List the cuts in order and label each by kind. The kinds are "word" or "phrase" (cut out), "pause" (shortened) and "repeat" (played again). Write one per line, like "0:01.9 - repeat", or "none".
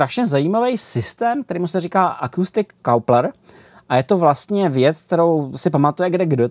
none